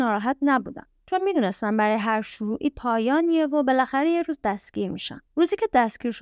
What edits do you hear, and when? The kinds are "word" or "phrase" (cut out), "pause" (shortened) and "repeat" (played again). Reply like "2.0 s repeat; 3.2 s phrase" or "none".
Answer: 5.3 s pause